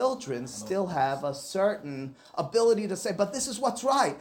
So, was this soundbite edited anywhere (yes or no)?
no